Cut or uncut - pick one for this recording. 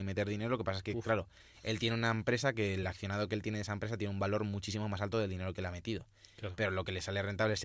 uncut